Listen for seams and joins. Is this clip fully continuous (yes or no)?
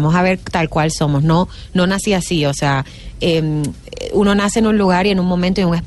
yes